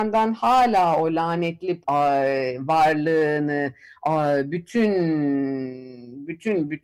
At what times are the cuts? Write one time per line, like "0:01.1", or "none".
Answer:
0:01.8